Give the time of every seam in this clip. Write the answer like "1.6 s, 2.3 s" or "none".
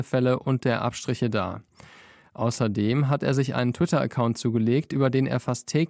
none